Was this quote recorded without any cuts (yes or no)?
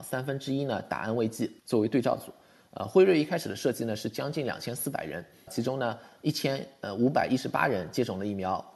no